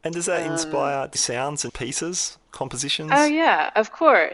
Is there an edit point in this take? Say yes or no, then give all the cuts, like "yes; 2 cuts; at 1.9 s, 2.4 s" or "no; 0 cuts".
yes; 2 cuts; at 1.1 s, 1.7 s